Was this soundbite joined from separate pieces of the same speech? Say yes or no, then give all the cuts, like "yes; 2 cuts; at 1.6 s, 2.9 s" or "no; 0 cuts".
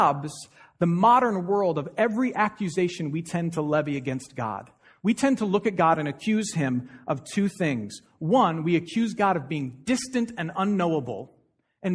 no; 0 cuts